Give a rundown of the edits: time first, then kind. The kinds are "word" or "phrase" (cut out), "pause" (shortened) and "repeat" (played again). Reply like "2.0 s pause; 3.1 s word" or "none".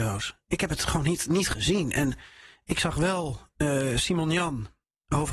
none